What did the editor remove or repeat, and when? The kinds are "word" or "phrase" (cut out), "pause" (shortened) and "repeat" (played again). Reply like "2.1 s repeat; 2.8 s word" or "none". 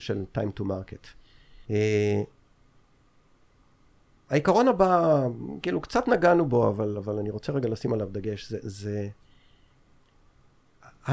1.6 s pause